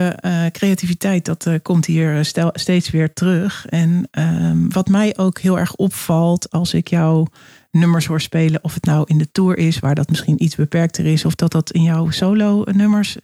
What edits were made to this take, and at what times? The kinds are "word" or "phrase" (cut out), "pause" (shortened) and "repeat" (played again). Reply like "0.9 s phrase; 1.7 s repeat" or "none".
none